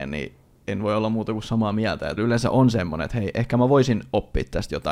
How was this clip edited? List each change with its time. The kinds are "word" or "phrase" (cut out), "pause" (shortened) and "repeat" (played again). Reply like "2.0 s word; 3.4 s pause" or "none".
2.2 s word